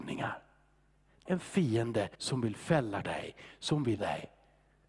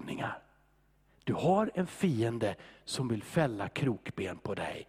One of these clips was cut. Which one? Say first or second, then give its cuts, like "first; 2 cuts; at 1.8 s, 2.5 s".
first; 4 cuts; at 1.3 s, 2.1 s, 3.0 s, 4.0 s